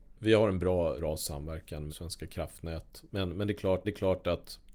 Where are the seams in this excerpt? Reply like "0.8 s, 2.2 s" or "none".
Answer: 1.0 s, 1.9 s, 3.8 s